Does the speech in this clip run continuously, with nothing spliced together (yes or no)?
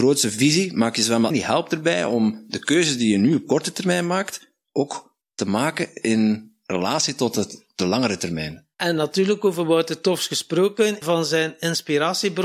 no